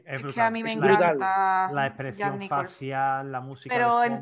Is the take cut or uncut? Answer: uncut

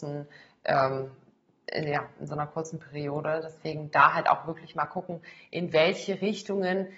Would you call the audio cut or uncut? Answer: uncut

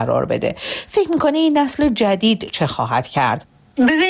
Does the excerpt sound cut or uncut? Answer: uncut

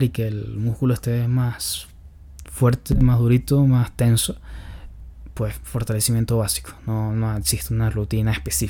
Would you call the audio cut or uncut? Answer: uncut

